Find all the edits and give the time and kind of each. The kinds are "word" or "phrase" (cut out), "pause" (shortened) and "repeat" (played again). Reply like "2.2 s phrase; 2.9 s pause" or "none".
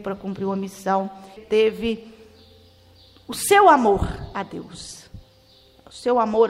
1.4 s phrase